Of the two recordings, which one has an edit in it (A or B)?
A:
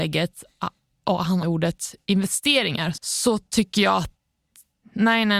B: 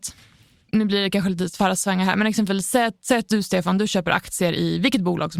A